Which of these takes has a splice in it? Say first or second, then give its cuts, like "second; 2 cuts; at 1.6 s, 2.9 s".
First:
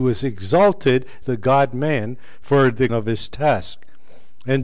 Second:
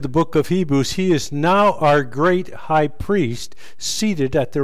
first; 2 cuts; at 1.2 s, 2.9 s